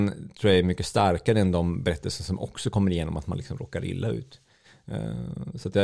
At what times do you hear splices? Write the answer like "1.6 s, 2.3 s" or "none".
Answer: none